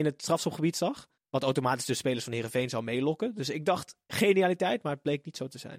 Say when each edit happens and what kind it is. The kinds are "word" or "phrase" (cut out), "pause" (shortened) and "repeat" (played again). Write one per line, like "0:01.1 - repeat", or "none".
0:01.2 - pause